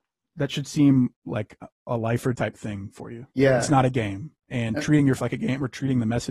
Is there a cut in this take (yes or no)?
yes